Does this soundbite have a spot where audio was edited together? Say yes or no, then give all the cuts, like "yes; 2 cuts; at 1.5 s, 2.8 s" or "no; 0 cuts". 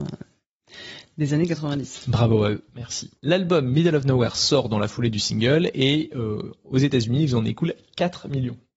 no; 0 cuts